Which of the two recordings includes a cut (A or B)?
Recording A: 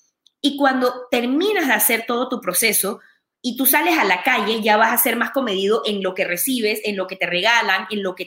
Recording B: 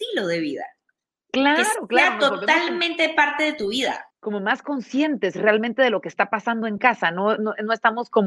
B